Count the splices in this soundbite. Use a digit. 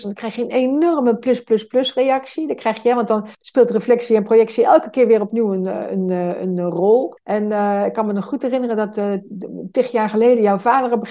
2